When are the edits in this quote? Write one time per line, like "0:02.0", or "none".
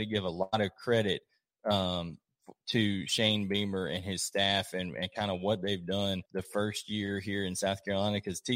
0:06.3